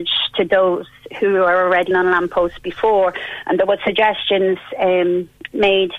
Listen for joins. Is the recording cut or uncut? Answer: cut